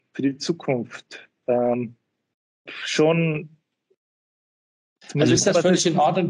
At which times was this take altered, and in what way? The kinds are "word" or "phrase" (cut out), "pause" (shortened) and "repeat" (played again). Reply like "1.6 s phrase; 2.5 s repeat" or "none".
1.3 s word; 2.7 s word; 5.4 s word